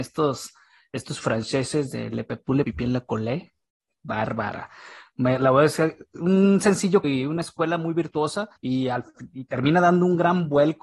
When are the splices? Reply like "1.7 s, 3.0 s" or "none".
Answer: 2.6 s, 7.0 s, 8.6 s